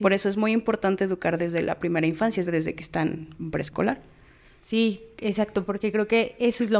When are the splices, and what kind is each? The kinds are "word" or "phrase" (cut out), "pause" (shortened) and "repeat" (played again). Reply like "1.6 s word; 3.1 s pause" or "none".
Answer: 2.5 s word